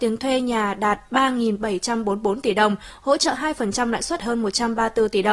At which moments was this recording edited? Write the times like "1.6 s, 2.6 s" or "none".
4.2 s